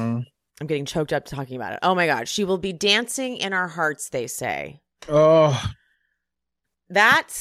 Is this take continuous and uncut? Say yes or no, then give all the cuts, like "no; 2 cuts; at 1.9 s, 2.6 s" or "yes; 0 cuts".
yes; 0 cuts